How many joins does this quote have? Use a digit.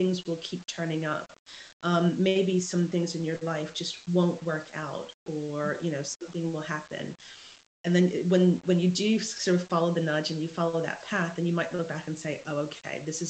0